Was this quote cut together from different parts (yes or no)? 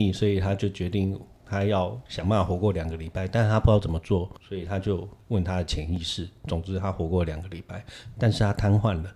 yes